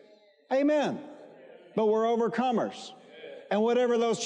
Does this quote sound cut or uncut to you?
uncut